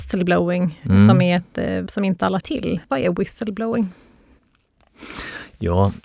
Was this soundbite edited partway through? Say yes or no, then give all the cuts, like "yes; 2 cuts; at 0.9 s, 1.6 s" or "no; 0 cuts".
yes; 3 cuts; at 1.9 s, 2.4 s, 2.8 s